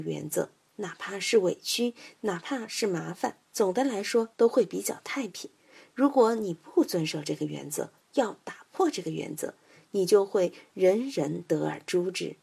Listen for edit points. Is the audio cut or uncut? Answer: cut